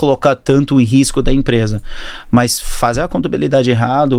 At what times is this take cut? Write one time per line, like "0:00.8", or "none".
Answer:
none